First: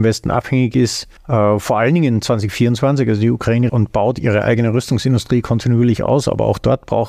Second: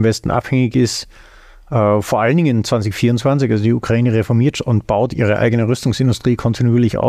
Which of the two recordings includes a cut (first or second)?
first